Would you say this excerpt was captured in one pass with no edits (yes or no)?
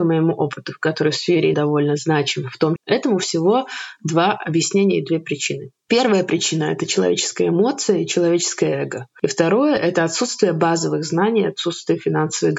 no